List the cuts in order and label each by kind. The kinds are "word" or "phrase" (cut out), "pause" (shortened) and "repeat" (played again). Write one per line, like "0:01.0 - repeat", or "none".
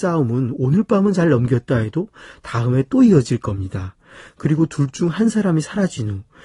none